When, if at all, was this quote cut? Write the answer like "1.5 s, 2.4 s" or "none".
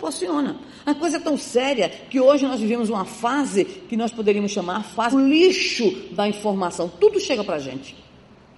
5.1 s